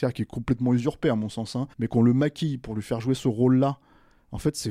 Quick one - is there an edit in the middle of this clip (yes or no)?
yes